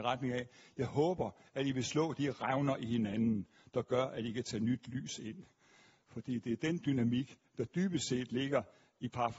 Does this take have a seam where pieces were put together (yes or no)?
no